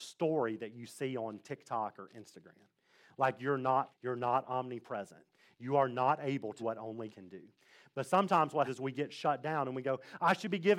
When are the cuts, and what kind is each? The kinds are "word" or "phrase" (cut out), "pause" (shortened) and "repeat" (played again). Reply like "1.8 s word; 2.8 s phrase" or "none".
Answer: 3.9 s word; 6.6 s word; 7.1 s word; 8.7 s word